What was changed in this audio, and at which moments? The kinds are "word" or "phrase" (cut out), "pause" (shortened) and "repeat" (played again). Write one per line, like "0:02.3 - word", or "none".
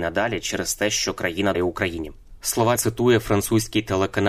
0:01.5 - word
0:02.8 - word

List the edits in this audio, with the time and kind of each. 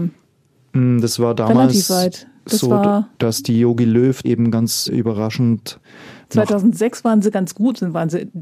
0:03.1 - pause
0:04.2 - word
0:04.9 - word

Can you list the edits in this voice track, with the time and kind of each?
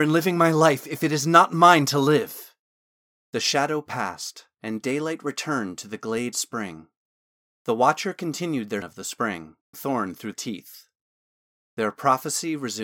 0:06.3 - word
0:08.8 - word
0:09.7 - word
0:10.3 - word

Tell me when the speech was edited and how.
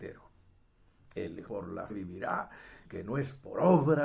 0:01.5 - word
0:01.9 - word
0:02.8 - word

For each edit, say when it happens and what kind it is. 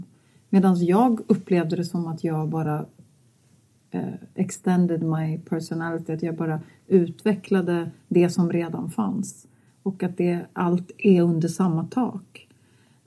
none

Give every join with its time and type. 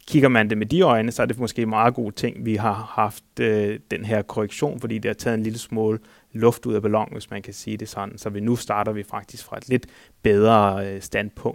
none

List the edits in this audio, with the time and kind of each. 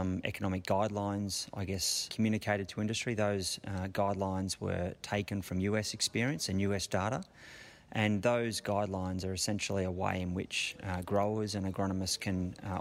none

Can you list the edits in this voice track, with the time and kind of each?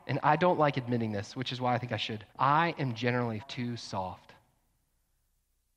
0:02.3 - pause
0:03.4 - word

